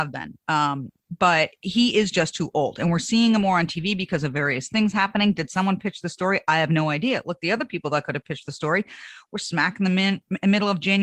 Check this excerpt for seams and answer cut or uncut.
uncut